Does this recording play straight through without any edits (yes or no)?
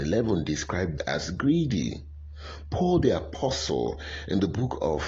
no